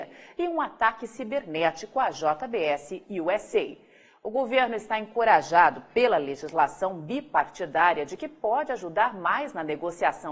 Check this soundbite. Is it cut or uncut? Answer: uncut